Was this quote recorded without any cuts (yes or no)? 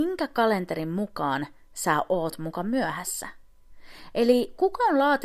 yes